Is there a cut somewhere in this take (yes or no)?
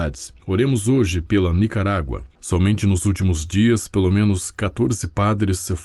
no